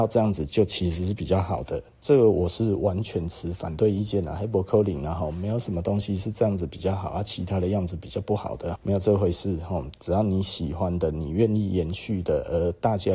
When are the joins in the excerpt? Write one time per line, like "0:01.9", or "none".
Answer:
0:08.8